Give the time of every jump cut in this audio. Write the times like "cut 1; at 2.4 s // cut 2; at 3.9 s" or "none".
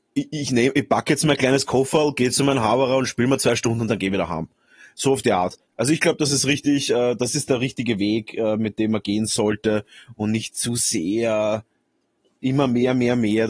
none